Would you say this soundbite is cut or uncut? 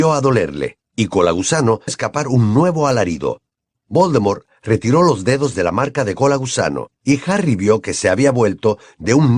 cut